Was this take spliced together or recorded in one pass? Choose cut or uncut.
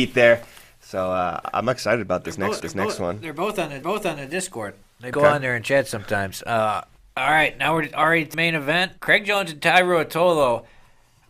cut